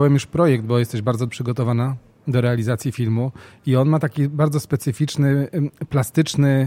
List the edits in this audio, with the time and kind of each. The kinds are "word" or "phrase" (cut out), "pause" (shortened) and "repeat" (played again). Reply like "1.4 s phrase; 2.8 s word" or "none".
1.3 s word

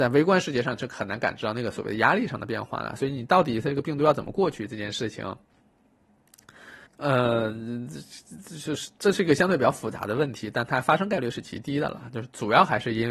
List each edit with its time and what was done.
6.9 s pause

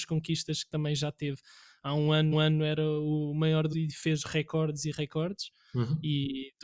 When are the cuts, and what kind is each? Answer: 2.3 s repeat; 3.7 s word

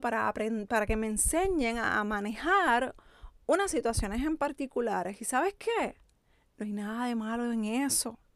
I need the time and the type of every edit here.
none

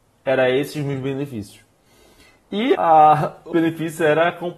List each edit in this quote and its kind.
2.7 s word; 3.5 s word

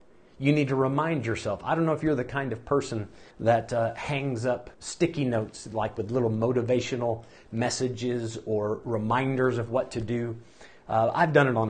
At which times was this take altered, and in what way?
3.3 s pause; 4.7 s pause

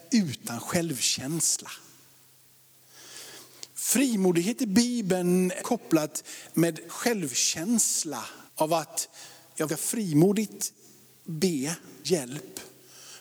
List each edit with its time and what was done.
5.6 s word; 6.9 s word; 8.5 s pause; 9.7 s word; 12.0 s word

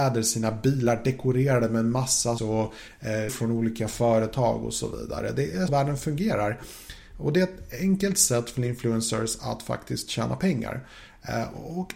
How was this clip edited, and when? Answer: 2.4 s word; 3.3 s word; 5.7 s word

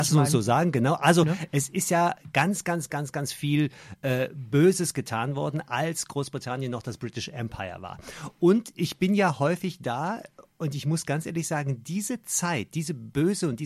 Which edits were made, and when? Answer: none

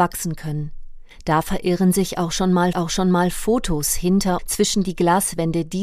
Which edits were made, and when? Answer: 1.1 s pause; 2.7 s repeat; 4.4 s word

